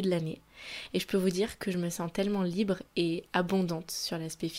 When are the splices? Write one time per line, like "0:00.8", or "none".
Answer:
none